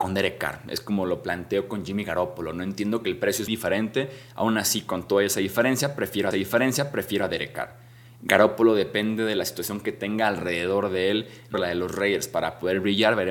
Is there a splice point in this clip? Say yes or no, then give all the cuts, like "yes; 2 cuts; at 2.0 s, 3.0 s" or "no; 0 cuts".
yes; 3 cuts; at 3.5 s, 6.3 s, 11.5 s